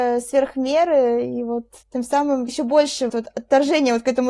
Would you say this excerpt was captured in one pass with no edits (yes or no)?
no